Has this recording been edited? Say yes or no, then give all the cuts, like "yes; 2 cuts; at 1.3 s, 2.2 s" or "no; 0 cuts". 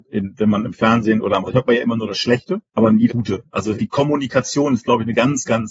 yes; 4 cuts; at 1.5 s, 2.7 s, 3.1 s, 3.8 s